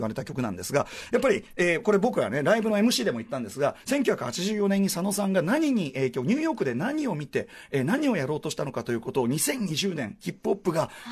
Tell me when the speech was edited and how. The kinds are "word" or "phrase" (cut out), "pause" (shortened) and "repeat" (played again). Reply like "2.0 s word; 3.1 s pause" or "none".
none